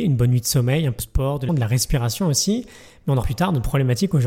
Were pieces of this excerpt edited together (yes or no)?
yes